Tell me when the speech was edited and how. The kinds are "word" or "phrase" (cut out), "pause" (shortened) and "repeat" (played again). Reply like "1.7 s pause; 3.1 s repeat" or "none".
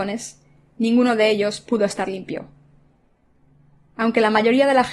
none

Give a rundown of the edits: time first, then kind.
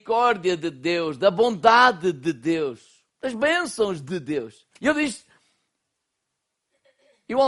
3.1 s pause; 4.8 s pause

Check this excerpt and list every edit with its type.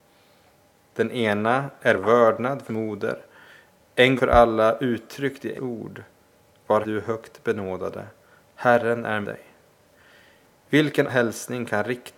2.0 s word; 2.7 s word; 4.2 s word; 5.5 s word; 6.8 s word; 9.2 s word; 11.1 s word

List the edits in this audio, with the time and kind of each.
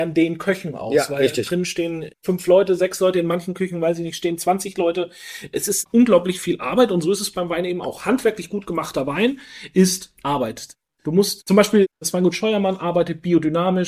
5.9 s word; 11.9 s pause

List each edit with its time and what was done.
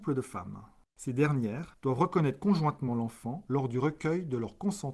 none

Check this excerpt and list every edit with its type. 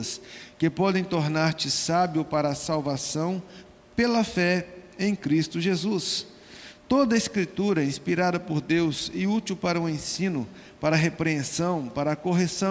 none

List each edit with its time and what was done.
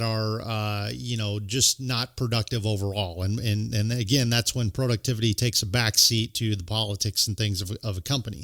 none

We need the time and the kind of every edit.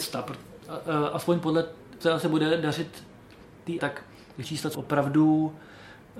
2.0 s word; 3.8 s word; 4.4 s phrase; 4.7 s phrase

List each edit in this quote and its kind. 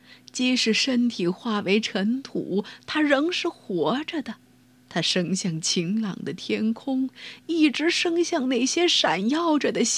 4.6 s pause

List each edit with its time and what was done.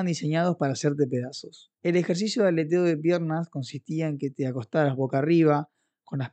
1.7 s pause

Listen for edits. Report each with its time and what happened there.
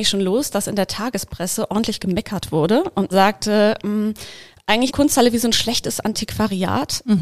3.1 s word; 4.9 s word

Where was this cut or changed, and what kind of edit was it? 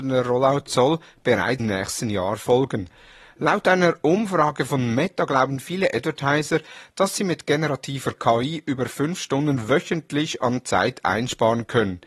1.6 s word

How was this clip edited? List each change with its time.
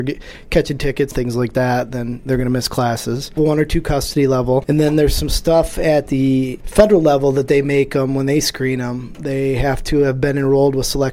none

